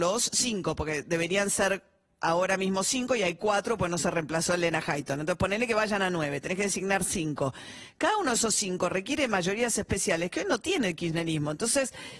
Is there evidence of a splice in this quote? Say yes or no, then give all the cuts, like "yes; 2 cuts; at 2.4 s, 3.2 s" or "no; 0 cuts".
no; 0 cuts